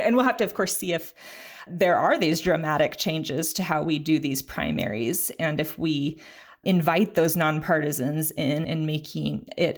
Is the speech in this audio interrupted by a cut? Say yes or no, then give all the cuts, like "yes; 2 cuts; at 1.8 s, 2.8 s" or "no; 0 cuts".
yes; 3 cuts; at 1.7 s, 6.6 s, 8.6 s